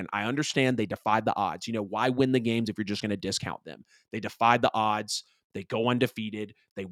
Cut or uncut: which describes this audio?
uncut